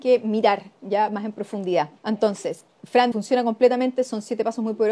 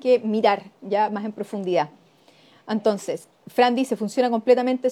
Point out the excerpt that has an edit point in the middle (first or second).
first